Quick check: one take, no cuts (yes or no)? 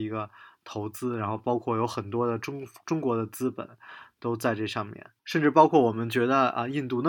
no